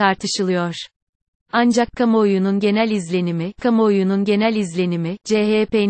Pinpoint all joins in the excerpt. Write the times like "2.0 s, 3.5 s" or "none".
3.6 s